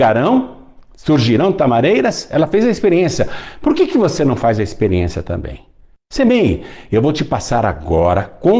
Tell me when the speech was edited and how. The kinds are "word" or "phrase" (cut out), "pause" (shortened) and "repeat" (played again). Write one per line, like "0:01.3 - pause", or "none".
none